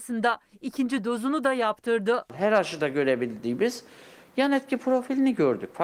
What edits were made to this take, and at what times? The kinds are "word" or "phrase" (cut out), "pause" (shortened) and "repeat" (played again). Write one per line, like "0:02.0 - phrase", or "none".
none

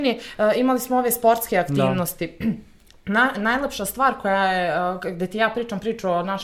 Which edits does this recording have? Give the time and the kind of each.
none

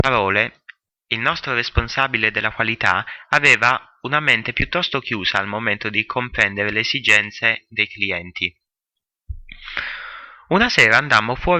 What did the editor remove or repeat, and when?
none

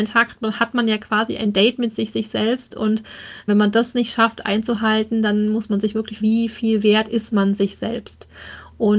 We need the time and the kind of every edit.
0:02.1 - repeat
0:03.5 - word
0:06.2 - word

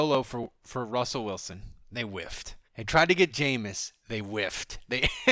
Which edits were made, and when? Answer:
0:01.8 - pause
0:02.6 - pause

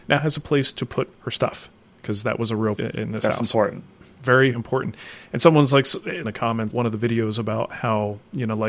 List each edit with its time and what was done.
0:02.8 - word
0:04.5 - word
0:06.2 - phrase
0:06.7 - word

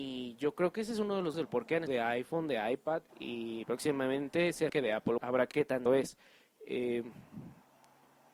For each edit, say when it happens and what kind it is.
0:01.3 - word
0:01.9 - phrase
0:03.1 - pause
0:04.7 - word
0:05.2 - word
0:05.5 - word
0:05.9 - word

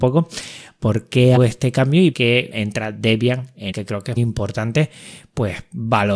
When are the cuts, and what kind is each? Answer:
0:01.4 - word
0:02.1 - word
0:02.5 - word
0:03.7 - word
0:04.2 - word

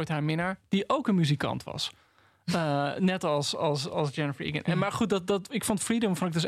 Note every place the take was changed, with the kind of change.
none

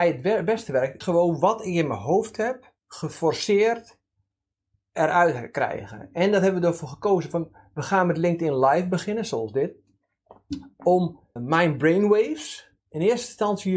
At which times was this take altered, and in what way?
0:01.0 - word
0:02.8 - pause
0:11.4 - word
0:12.8 - pause

